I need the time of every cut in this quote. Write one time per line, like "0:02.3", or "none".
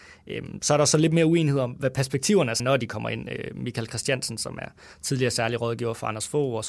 0:02.6